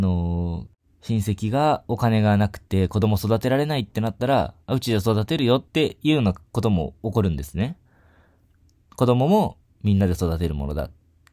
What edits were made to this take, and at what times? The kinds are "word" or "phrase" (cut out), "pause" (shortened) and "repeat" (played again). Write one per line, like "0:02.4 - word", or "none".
0:05.7 - pause